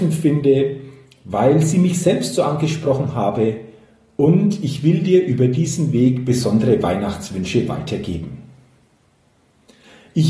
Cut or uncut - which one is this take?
uncut